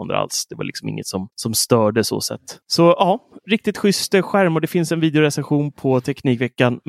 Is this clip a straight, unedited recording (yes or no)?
no